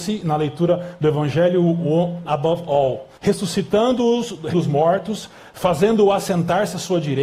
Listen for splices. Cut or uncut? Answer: cut